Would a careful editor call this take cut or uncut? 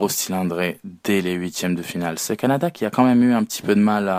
uncut